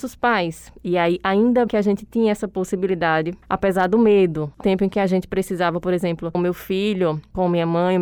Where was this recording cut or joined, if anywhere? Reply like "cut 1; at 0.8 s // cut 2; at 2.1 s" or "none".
cut 1; at 1.7 s // cut 2; at 4.6 s // cut 3; at 6.3 s